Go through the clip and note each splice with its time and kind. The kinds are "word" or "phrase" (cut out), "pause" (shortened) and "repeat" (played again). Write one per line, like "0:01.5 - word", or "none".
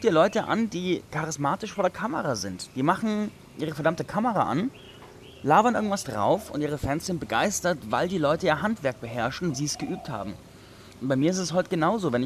0:09.5 - word